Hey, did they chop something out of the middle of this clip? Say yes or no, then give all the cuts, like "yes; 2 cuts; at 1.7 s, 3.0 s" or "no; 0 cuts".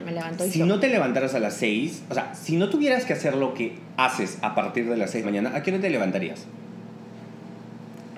yes; 1 cut; at 5.2 s